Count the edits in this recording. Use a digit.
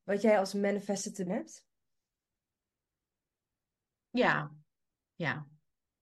1